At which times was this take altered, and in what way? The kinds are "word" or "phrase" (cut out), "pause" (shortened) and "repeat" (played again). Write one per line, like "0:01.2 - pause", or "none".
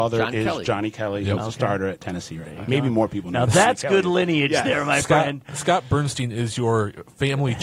none